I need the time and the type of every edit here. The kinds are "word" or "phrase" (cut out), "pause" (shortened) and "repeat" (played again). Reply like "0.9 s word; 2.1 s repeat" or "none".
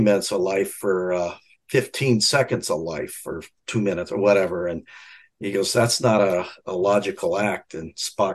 none